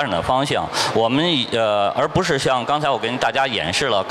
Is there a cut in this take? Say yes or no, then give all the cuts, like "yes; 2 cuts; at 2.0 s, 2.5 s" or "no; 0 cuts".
no; 0 cuts